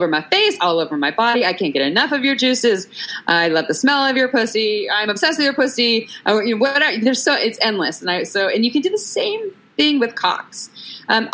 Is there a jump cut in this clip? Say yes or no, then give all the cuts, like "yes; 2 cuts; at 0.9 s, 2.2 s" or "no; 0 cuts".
no; 0 cuts